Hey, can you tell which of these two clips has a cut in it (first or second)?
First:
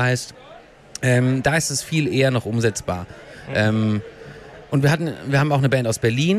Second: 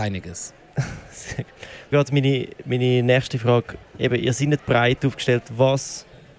second